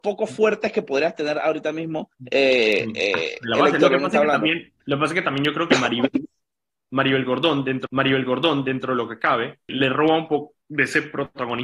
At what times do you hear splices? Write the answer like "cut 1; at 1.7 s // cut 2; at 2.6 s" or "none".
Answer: cut 1; at 2.1 s // cut 2; at 4.8 s // cut 3; at 7.9 s // cut 4; at 9.7 s // cut 5; at 10.6 s